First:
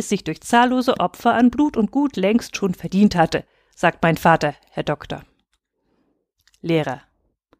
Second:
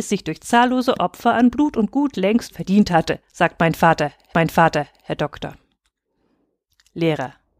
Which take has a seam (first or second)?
second